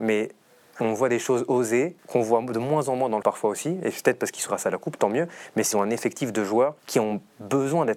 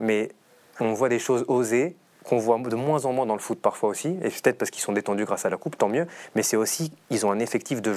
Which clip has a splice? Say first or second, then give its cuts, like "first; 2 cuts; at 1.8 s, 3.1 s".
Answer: first; 5 cuts; at 2.0 s, 3.2 s, 4.5 s, 5.7 s, 6.8 s